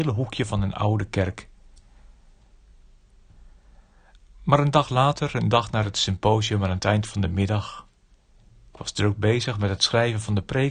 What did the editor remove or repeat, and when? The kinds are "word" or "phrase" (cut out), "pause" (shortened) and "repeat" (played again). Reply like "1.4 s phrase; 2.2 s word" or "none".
none

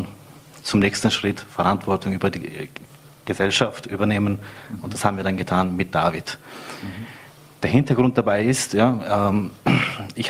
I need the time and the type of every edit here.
none

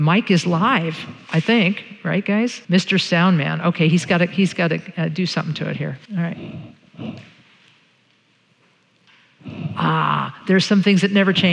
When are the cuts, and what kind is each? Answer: 2.6 s pause; 6.1 s pause

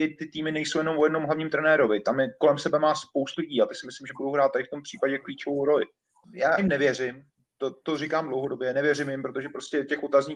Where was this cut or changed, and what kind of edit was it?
3.4 s word; 6.6 s word

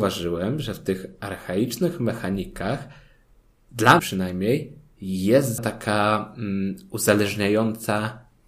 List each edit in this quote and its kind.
4.0 s word; 5.6 s word

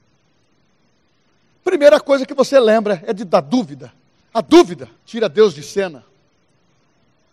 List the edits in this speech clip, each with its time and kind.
4.1 s pause; 5.0 s pause

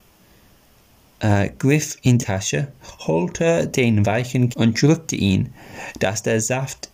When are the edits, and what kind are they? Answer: 2.2 s word; 4.5 s word

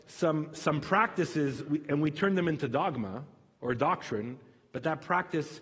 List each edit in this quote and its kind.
none

